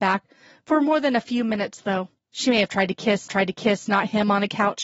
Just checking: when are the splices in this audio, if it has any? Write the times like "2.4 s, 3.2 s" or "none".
2.2 s, 3.3 s